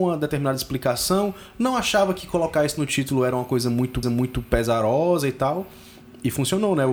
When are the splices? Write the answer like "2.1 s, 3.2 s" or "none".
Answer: 4.0 s